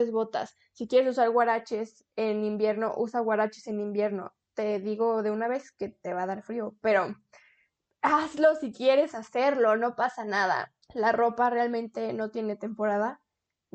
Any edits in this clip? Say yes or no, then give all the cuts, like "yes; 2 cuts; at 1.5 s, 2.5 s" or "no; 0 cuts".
yes; 1 cut; at 10.8 s